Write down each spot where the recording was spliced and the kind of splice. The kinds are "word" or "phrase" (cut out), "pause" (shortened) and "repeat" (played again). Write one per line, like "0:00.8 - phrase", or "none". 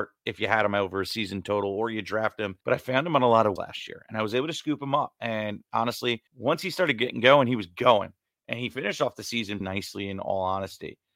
0:02.6 - pause
0:03.6 - word
0:06.3 - pause
0:09.6 - word